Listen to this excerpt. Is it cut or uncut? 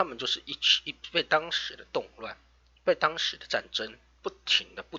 cut